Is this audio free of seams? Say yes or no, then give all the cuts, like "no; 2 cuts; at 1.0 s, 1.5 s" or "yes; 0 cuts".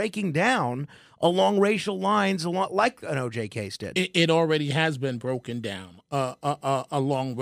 yes; 0 cuts